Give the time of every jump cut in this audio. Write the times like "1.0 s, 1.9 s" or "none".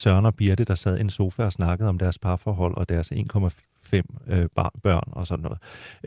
none